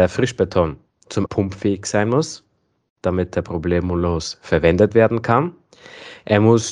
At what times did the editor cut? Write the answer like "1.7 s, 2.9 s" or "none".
1.3 s